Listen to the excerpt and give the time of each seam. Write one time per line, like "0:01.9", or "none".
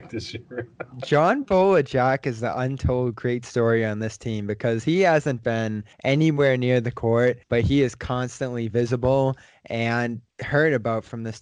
0:05.9
0:07.4
0:10.3